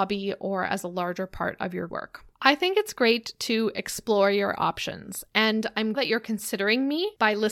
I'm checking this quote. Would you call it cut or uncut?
cut